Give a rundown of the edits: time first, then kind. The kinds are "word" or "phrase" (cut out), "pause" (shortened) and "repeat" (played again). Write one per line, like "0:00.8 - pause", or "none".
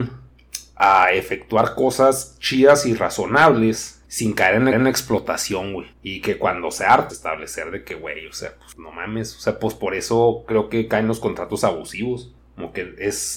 0:04.0 - pause
0:04.7 - repeat
0:05.9 - pause
0:07.1 - word

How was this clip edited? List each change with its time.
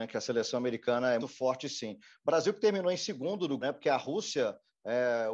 0:01.2 - word
0:03.6 - word

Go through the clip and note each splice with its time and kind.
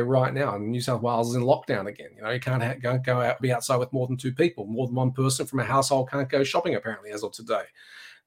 0:03.4 - word

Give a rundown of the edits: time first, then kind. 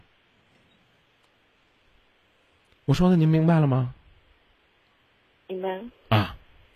none

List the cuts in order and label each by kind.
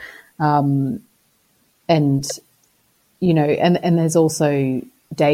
none

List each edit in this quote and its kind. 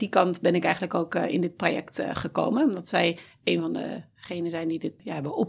none

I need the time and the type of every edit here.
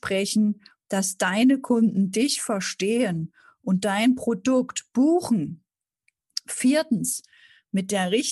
none

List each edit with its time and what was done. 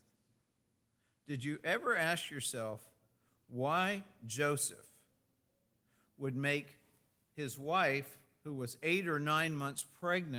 none

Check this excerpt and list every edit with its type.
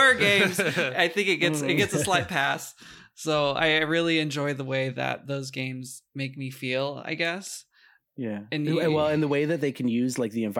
none

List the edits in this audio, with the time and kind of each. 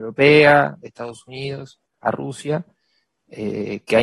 none

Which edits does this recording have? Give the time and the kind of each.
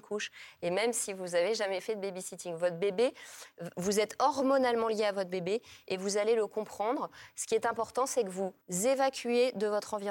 0:08.6 - pause

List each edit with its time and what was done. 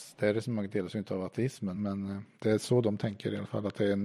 0:01.7 - word
0:02.3 - word

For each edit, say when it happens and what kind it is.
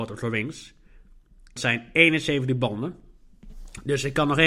0:01.6 - word

